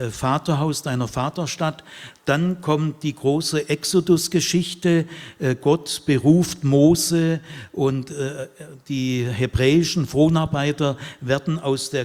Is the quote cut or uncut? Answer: uncut